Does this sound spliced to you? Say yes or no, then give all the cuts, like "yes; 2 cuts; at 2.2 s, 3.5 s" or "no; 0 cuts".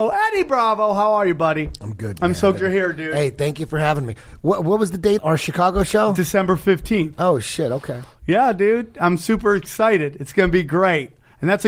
yes; 2 cuts; at 2.5 s, 5.2 s